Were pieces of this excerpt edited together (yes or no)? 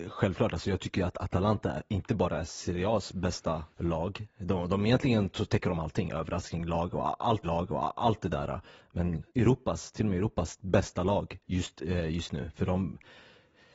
yes